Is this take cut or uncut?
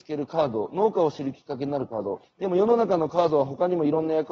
cut